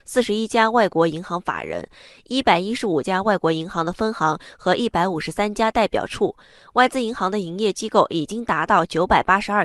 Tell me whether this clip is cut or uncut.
uncut